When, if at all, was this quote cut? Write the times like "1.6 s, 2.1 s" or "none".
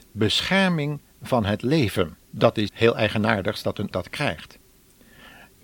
2.3 s, 2.7 s, 3.9 s